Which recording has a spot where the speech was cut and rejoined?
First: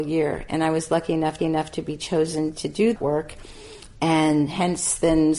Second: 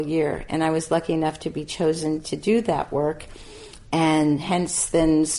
first; 2 cuts; at 1.4 s, 3.0 s

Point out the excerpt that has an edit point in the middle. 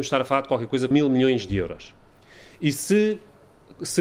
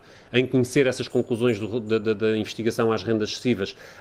first; 1 cut; at 0.9 s

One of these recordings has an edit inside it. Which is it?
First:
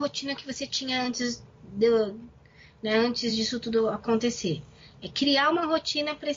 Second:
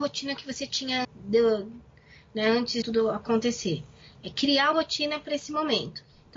second; 3 cuts; at 1.0 s, 2.8 s, 4.7 s

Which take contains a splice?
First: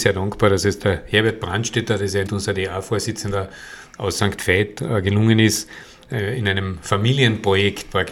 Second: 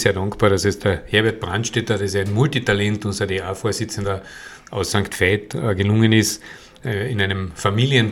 first; 1 cut; at 2.3 s

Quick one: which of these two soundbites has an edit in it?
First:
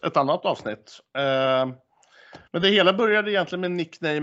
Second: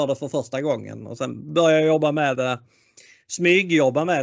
first; 1 cut; at 2.5 s

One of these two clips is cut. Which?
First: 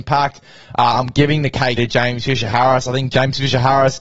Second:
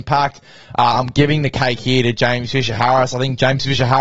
first; 1 cut; at 1.8 s

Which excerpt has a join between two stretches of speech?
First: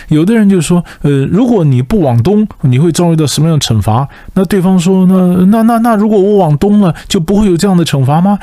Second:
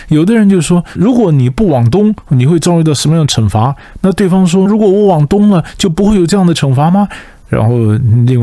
second; 2 cuts; at 1.0 s, 4.7 s

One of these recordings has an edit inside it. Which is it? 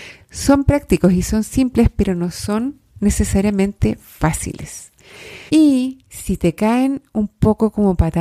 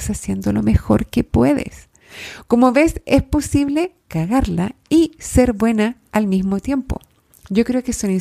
first; 1 cut; at 5.5 s

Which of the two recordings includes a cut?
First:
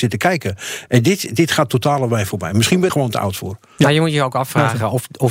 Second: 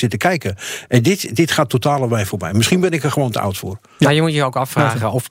first; 1 cut; at 2.9 s

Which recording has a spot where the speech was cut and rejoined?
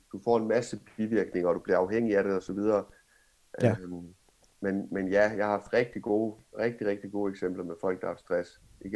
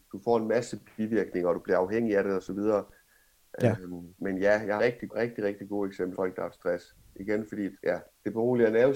second; 5 cuts; at 4.2 s, 4.8 s, 5.1 s, 6.1 s, 7.8 s

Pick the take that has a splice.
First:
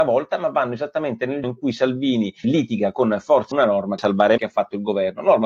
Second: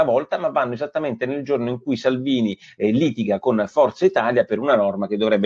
first; 5 cuts; at 1.4 s, 2.4 s, 3.5 s, 4.0 s, 4.4 s

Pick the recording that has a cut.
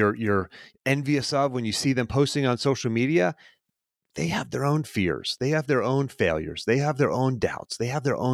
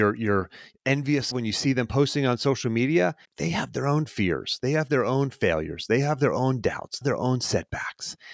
second; 3 cuts; at 1.3 s, 3.2 s, 7.0 s

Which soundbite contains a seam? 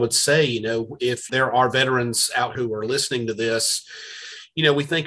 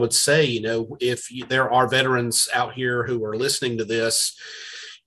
first; 2 cuts; at 1.3 s, 2.5 s

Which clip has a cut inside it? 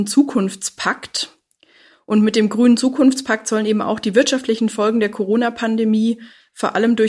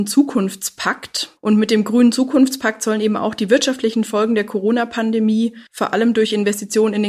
second; 2 cuts; at 1.4 s, 5.7 s

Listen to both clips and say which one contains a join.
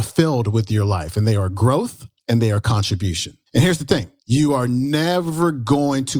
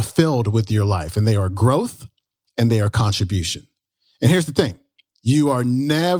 first; 3 cuts; at 2.2 s, 3.5 s, 4.2 s

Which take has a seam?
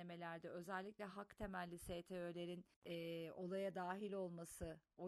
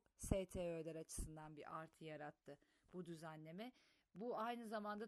first; 1 cut; at 2.7 s

